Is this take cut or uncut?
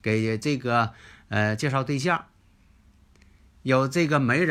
uncut